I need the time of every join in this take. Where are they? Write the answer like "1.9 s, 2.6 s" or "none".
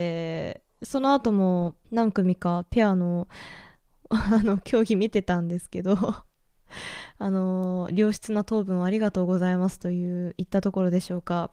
1.8 s